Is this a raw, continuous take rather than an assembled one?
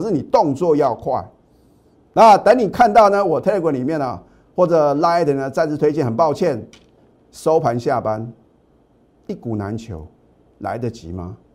yes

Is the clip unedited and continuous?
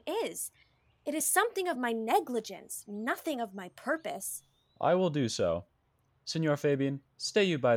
yes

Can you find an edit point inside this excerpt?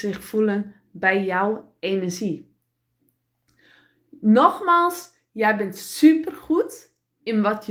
no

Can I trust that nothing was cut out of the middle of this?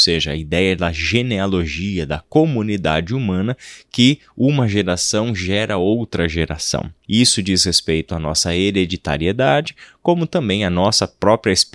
yes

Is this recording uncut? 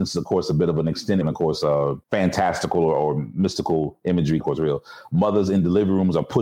no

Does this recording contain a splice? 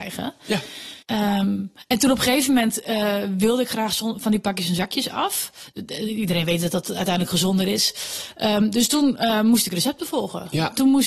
yes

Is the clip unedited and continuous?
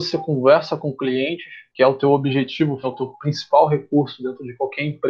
no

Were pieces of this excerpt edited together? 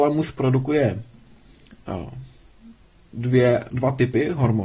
no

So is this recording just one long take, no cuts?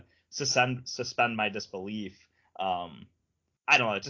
yes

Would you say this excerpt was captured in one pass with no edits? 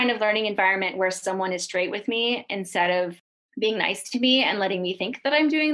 yes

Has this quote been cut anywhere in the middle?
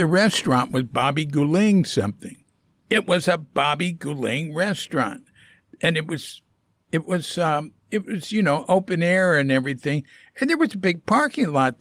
no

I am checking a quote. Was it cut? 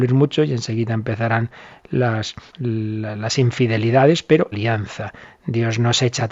yes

